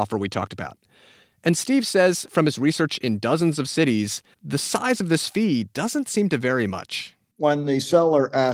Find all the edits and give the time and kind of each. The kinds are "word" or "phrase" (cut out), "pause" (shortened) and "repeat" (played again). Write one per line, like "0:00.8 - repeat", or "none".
0:04.3 - pause